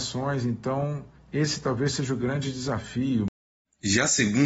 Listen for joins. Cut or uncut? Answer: cut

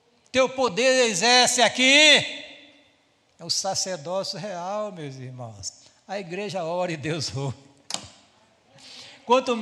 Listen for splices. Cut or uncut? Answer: uncut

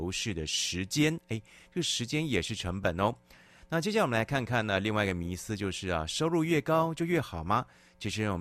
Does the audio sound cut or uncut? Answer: uncut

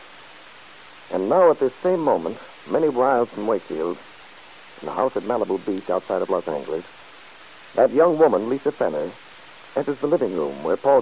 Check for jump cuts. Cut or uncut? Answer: uncut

